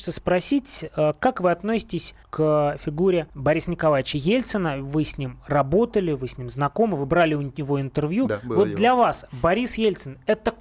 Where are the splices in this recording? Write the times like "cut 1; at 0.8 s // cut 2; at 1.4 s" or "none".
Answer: cut 1; at 2.2 s // cut 2; at 3.3 s